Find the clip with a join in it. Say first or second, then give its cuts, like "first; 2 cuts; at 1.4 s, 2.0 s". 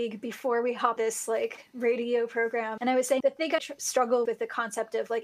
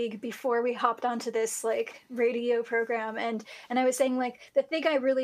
first; 5 cuts; at 1.0 s, 2.8 s, 3.2 s, 3.6 s, 4.3 s